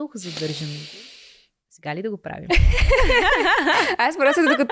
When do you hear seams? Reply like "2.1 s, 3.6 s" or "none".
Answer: none